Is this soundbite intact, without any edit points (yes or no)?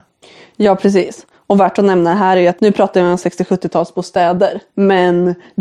no